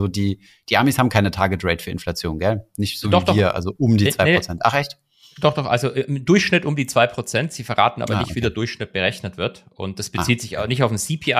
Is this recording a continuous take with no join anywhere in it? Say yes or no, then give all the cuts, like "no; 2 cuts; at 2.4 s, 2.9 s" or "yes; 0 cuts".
yes; 0 cuts